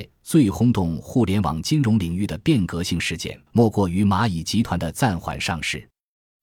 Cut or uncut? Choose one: cut